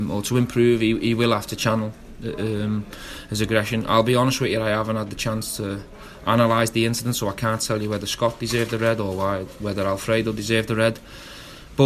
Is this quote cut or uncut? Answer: uncut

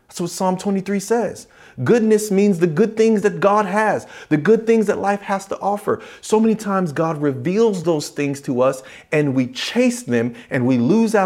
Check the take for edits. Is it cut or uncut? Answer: uncut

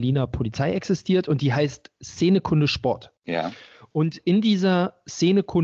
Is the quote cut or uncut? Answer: cut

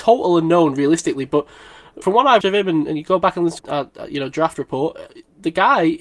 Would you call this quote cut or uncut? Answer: cut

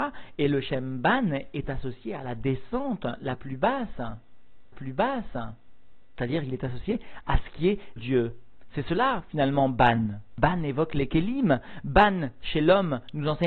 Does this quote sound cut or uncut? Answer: cut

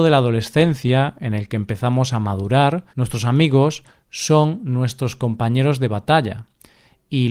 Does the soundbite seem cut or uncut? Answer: cut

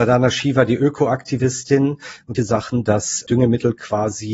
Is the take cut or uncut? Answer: cut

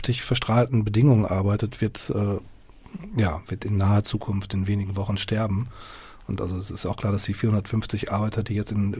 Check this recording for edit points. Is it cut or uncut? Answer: uncut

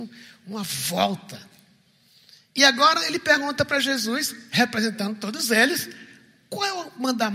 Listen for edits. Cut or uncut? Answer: uncut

